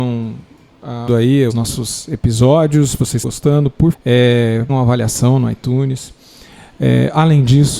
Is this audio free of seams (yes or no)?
no